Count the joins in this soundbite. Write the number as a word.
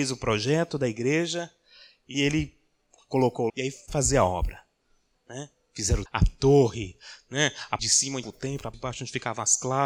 seven